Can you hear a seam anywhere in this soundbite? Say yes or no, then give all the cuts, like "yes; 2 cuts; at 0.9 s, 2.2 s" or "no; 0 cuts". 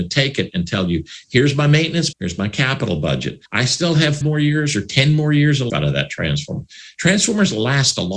yes; 4 cuts; at 2.1 s, 3.5 s, 4.2 s, 5.7 s